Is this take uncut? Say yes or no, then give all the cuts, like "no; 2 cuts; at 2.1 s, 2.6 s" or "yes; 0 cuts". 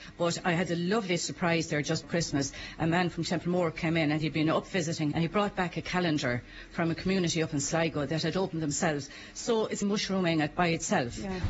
no; 3 cuts; at 2.0 s, 5.1 s, 9.8 s